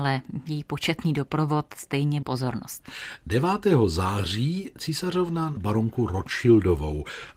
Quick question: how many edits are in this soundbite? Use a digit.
2